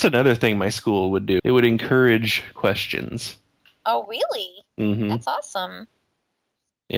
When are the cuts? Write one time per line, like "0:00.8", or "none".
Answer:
0:01.4
0:04.7